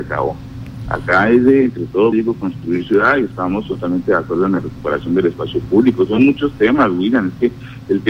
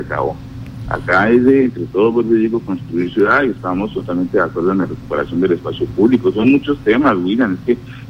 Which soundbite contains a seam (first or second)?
first